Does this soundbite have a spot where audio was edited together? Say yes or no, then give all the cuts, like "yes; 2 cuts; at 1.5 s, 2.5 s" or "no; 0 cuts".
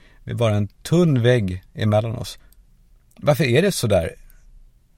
no; 0 cuts